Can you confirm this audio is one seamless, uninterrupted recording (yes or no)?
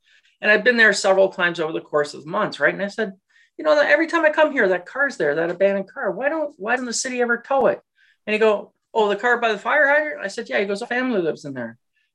no